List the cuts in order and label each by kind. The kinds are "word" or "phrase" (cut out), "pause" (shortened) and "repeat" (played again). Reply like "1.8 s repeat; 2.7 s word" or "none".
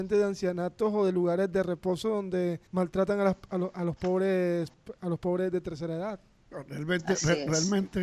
2.7 s pause